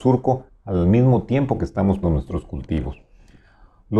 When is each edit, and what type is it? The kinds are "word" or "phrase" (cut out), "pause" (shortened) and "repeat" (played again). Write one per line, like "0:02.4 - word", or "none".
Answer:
0:02.0 - word